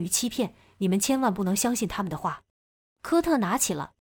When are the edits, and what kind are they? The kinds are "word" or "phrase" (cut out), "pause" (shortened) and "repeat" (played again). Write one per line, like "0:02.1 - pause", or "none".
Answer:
0:02.5 - pause